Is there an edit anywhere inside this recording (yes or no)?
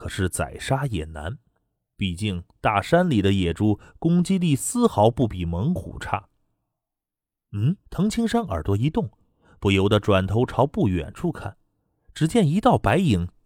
yes